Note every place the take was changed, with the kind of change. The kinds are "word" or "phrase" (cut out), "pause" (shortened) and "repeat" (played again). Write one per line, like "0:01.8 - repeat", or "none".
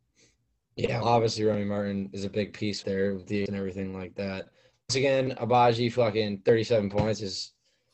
0:01.0 - word
0:02.8 - phrase
0:03.5 - word
0:04.9 - word